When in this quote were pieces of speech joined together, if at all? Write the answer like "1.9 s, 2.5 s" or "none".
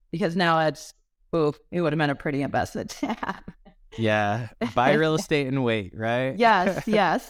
none